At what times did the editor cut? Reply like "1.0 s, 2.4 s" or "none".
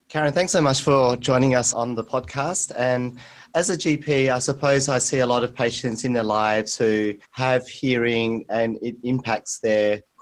1.7 s, 7.2 s